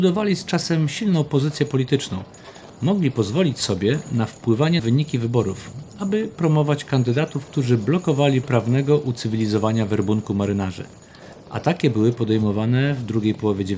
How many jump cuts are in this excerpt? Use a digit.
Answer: 2